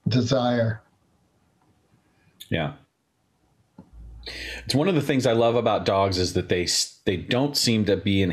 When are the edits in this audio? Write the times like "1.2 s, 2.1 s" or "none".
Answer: none

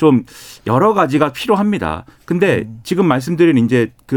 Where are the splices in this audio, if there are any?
none

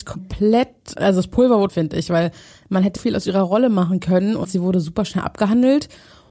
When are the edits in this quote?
1.0 s, 1.7 s, 3.0 s

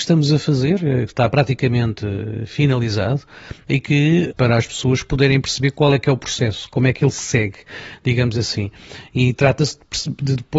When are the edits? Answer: 4.3 s

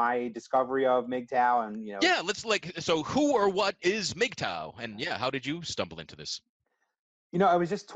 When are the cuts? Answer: none

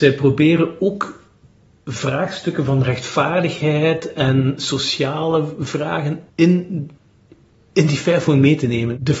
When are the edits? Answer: 6.3 s

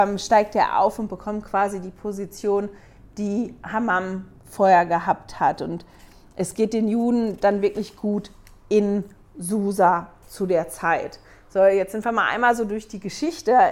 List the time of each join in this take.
none

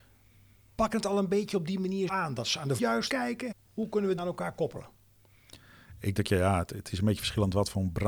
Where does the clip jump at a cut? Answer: 2.1 s, 2.8 s, 3.1 s, 3.5 s, 4.2 s, 6.2 s

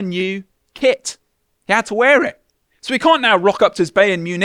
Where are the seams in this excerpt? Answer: 2.6 s

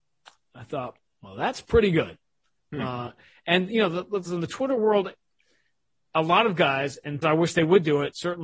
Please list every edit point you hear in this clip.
7.2 s

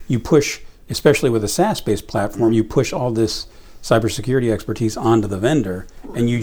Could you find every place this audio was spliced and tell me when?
none

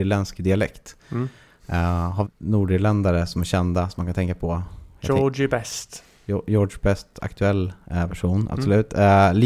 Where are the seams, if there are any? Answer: 2.2 s

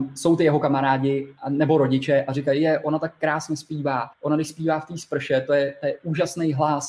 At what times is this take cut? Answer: 4.1 s

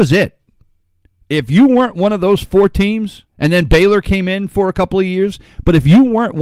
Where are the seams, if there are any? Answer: 3.3 s

